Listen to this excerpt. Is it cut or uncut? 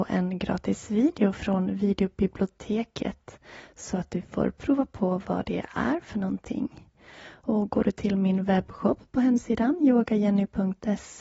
uncut